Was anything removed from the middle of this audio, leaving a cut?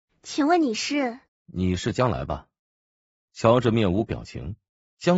yes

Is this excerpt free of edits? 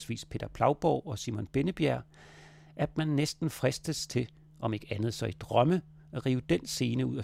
yes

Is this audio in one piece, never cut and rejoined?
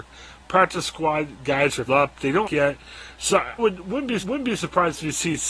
no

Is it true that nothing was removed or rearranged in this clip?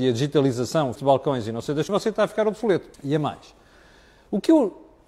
no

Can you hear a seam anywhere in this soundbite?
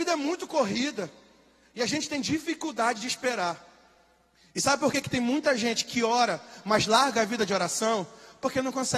no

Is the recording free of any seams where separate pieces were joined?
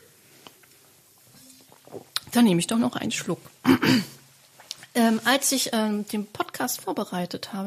yes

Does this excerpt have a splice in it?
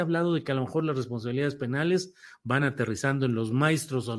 no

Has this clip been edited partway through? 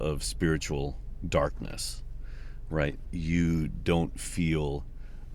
yes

